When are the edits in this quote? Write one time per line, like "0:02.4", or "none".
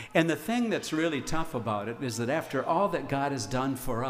none